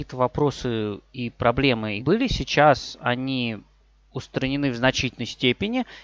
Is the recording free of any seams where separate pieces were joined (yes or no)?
no